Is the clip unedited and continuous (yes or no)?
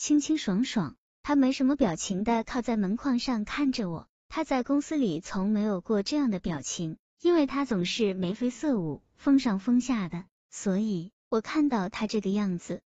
no